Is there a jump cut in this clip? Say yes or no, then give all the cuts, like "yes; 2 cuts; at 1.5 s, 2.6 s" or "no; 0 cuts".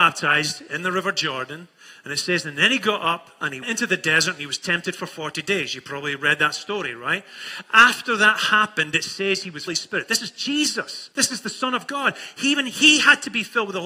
yes; 3 cuts; at 3.6 s, 9.7 s, 11.1 s